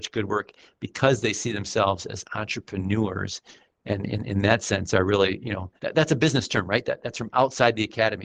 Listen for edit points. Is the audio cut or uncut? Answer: cut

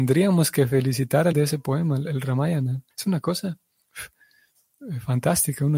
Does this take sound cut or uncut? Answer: cut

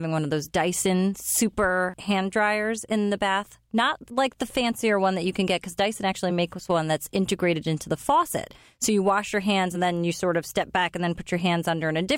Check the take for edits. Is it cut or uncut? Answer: uncut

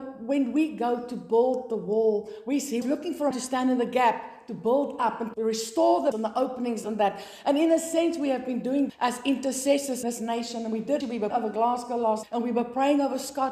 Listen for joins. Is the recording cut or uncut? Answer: cut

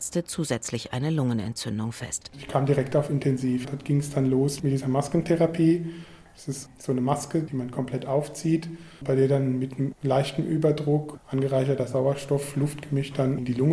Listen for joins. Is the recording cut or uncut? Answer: uncut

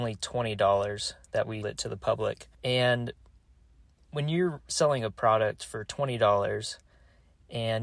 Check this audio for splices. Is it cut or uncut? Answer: cut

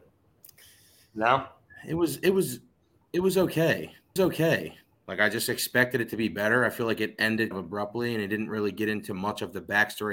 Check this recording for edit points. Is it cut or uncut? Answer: cut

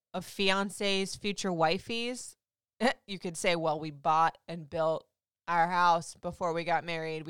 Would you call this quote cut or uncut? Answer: uncut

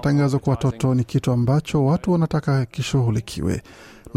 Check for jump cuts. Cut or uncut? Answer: uncut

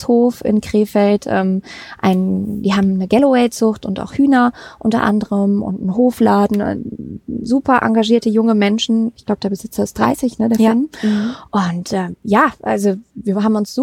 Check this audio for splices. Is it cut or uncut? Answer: uncut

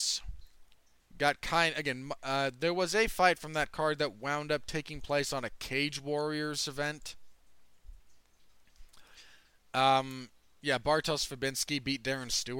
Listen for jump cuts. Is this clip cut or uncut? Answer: uncut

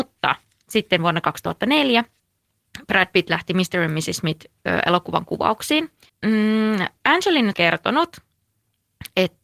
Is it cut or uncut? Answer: cut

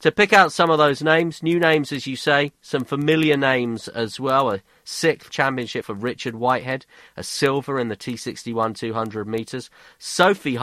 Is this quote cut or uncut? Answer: cut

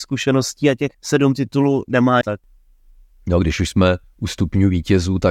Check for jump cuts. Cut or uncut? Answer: cut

